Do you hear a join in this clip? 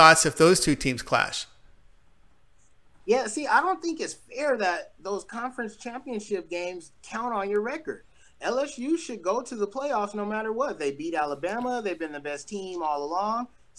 no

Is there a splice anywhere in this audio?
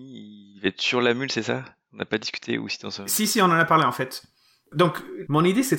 no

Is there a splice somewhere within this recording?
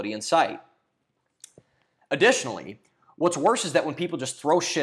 no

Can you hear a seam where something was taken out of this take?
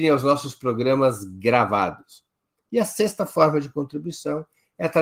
no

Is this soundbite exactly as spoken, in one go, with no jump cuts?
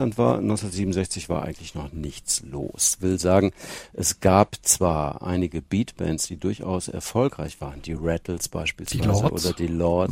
yes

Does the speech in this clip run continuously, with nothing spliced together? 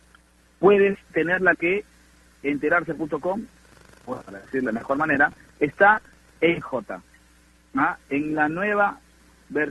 no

